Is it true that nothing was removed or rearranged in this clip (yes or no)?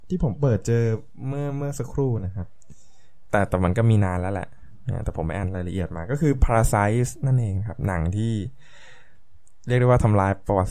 yes